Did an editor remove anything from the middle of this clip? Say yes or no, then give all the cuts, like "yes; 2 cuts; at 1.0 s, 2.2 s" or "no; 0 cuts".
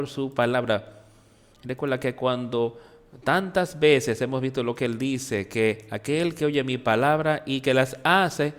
no; 0 cuts